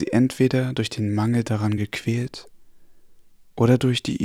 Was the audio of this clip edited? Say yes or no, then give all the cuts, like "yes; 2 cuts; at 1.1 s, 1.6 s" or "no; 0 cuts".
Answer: no; 0 cuts